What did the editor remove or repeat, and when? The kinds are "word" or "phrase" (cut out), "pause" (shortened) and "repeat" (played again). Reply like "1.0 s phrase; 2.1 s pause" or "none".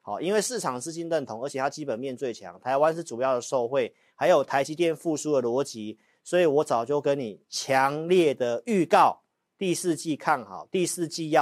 none